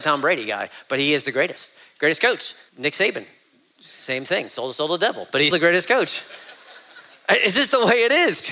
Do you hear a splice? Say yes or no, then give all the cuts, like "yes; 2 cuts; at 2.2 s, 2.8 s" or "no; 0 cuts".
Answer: yes; 2 cuts; at 2.7 s, 5.5 s